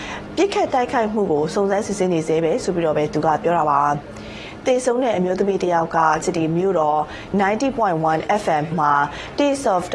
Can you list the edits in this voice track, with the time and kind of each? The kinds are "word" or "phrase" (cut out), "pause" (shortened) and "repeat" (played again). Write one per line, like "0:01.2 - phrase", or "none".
0:06.2 - word
0:07.3 - word
0:08.7 - word